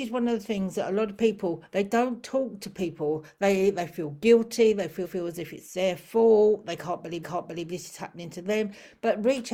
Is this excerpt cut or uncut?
cut